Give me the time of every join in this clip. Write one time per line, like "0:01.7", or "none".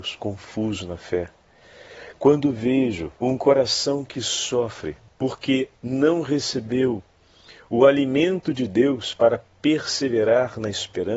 0:03.2
0:05.1